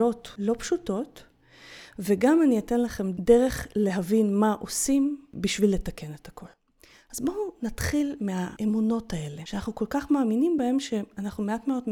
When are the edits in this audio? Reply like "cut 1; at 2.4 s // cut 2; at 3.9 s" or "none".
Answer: none